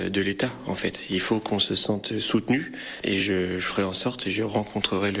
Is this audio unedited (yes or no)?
yes